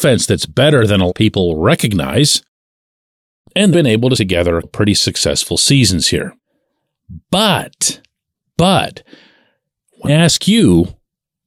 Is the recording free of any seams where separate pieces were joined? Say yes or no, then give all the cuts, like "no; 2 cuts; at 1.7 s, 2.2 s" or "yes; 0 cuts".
no; 5 cuts; at 1.1 s, 3.7 s, 4.2 s, 4.6 s, 10.1 s